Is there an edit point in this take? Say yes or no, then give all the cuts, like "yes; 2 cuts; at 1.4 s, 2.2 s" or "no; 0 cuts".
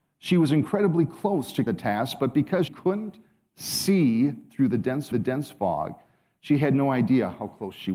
yes; 3 cuts; at 1.7 s, 2.7 s, 5.1 s